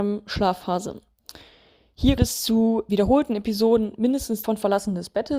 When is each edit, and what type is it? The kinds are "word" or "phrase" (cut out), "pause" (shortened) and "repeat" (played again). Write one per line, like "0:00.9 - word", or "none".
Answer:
0:02.2 - word
0:02.9 - word
0:04.4 - word